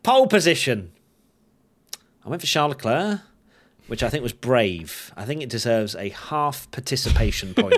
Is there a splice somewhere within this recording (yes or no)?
no